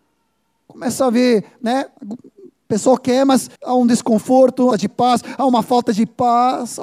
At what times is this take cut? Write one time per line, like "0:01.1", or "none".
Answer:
0:02.0
0:03.5
0:04.7